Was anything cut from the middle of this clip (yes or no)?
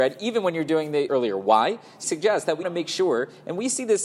yes